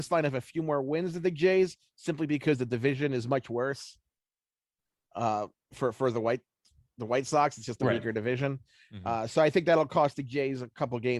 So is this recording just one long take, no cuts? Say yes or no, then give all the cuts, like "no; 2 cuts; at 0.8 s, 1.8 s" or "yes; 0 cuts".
yes; 0 cuts